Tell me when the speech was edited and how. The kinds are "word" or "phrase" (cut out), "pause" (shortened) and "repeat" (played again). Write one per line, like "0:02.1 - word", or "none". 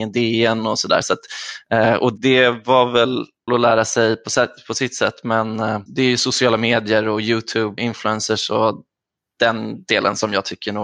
0:02.2 - word
0:03.5 - word
0:05.9 - pause
0:07.8 - word

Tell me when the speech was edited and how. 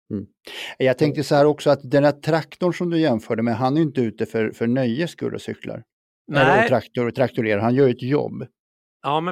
none

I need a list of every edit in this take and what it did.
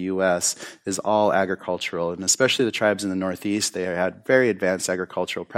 none

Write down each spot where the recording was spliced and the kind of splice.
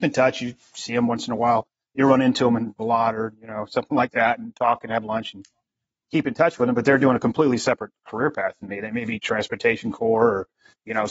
none

